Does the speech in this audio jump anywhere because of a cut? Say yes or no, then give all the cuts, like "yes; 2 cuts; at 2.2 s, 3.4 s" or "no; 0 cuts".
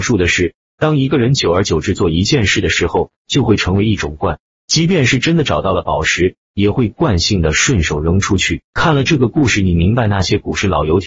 no; 0 cuts